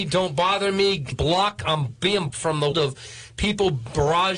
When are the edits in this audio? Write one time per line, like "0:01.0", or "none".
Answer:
0:01.1
0:02.3
0:02.7